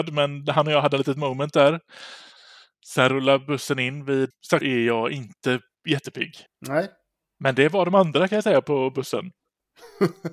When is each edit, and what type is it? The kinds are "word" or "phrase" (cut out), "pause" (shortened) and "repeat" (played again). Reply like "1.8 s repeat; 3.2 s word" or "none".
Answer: 4.3 s word; 4.6 s phrase; 6.5 s pause